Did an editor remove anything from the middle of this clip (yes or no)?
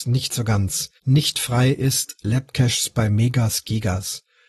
yes